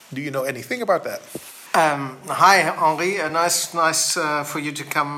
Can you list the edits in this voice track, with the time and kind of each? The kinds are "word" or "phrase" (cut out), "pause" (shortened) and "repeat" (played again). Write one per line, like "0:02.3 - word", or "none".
none

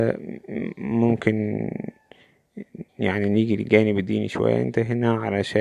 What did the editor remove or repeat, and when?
0:02.9 - pause

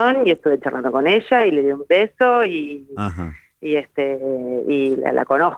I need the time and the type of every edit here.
none

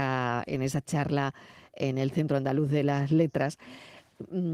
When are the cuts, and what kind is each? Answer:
none

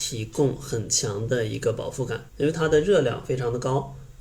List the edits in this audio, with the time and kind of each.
0:02.3 - pause

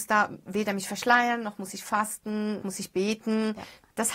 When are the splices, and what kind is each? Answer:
0:02.6 - word

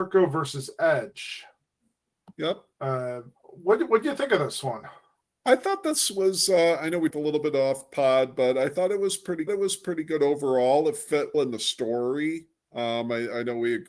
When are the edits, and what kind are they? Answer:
0:02.7 - pause
0:05.2 - pause
0:07.1 - word
0:09.5 - repeat
0:11.3 - word

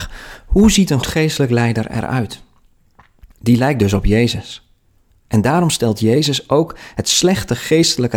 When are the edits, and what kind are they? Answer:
0:01.0 - word
0:03.3 - pause

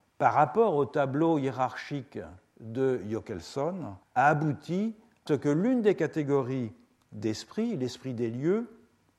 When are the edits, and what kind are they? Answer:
0:04.0 - pause
0:05.3 - word

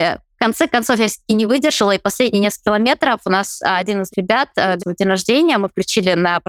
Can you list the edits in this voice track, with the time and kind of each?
0:04.1 - word
0:04.8 - phrase

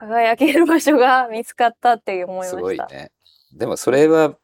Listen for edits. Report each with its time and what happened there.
none

